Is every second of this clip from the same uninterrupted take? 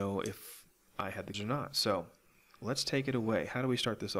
no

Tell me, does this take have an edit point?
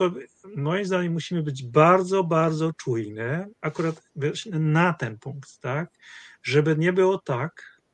yes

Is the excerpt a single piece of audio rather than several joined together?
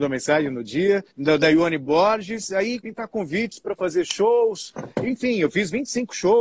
no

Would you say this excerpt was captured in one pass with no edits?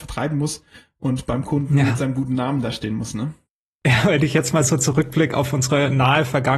yes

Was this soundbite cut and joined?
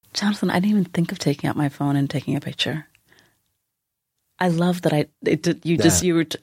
no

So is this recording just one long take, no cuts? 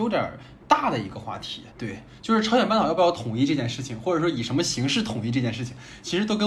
no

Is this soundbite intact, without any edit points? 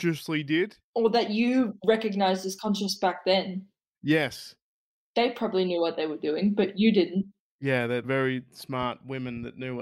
yes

